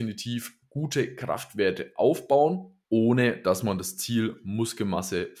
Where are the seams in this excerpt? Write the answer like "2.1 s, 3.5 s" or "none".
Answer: 2.8 s